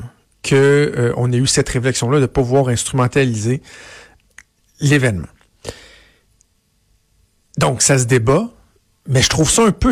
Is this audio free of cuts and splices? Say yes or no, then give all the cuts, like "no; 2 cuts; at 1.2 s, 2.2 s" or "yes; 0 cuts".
yes; 0 cuts